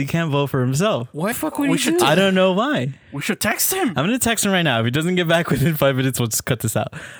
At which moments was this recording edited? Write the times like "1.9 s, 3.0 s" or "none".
1.3 s